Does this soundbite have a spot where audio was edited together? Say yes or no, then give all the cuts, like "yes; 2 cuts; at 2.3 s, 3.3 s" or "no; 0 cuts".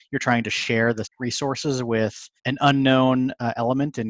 yes; 2 cuts; at 1.0 s, 2.4 s